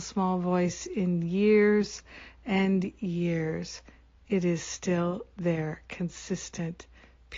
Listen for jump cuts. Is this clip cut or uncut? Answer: uncut